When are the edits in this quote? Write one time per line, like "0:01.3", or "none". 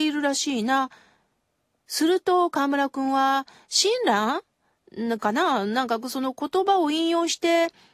none